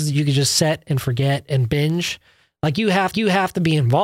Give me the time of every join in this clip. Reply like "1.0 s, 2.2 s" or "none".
3.1 s